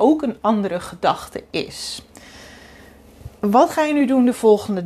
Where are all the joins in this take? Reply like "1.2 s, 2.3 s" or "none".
3.4 s